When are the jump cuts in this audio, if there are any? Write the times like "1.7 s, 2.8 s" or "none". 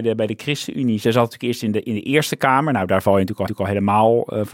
3.5 s